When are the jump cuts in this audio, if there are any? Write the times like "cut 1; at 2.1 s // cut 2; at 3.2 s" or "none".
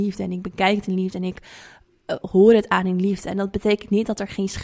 cut 1; at 2.2 s